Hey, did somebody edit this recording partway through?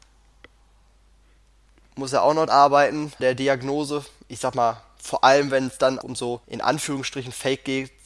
yes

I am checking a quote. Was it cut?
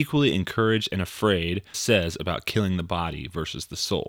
yes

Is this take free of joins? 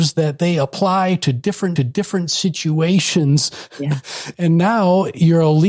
no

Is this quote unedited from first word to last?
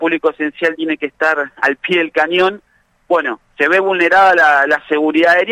no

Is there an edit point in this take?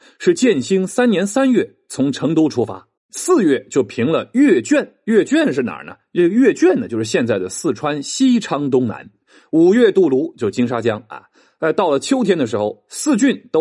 yes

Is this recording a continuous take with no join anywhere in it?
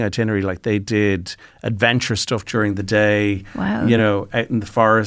yes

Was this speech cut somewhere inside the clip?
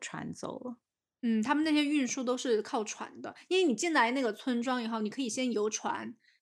yes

